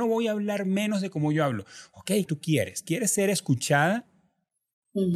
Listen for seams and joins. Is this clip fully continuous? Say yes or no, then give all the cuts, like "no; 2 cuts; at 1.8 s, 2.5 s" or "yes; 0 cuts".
no; 1 cut; at 2.2 s